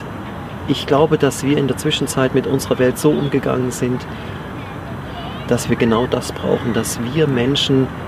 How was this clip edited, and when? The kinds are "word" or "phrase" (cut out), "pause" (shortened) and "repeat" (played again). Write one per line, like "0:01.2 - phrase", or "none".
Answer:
none